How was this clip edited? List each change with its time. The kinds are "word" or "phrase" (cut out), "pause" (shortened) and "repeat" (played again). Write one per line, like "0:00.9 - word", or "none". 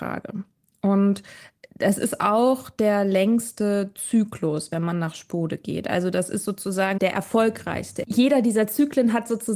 0:07.0 - word